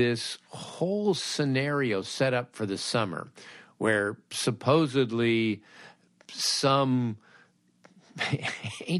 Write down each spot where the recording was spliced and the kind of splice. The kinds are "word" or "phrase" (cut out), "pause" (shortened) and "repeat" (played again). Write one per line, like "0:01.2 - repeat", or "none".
none